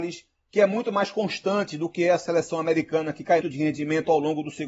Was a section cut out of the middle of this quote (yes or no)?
yes